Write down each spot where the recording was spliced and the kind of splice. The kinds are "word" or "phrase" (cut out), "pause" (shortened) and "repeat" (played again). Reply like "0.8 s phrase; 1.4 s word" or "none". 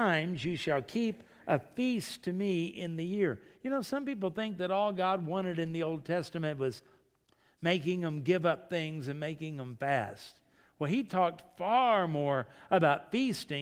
none